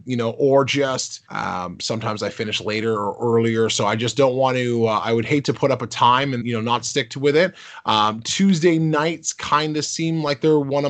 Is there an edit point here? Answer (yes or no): yes